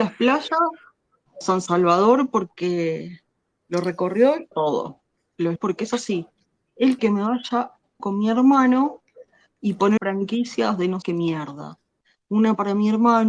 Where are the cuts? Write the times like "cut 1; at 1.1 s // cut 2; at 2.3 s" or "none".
cut 1; at 1.4 s // cut 2; at 4.5 s // cut 3; at 5.6 s // cut 4; at 7.0 s // cut 5; at 8.0 s // cut 6; at 10.0 s // cut 7; at 11.0 s